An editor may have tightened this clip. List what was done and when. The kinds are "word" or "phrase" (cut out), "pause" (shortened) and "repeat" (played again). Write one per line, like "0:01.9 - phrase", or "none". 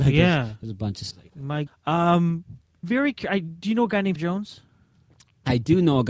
0:01.1 - word
0:01.7 - word
0:02.8 - phrase
0:04.2 - word